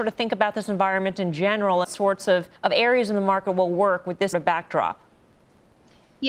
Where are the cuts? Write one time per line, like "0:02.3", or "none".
0:01.8
0:02.6
0:04.3